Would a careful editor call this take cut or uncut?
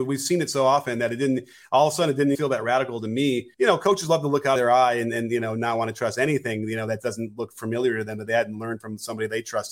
cut